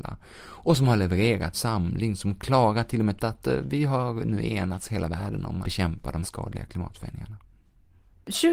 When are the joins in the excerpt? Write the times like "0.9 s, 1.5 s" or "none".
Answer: 1.5 s, 3.2 s, 5.6 s, 6.2 s